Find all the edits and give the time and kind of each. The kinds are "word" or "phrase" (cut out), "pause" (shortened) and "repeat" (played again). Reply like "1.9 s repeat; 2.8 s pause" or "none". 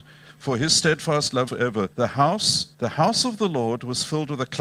1.5 s word; 1.9 s pause; 2.7 s pause